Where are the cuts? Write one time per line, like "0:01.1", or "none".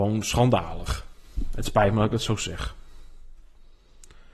none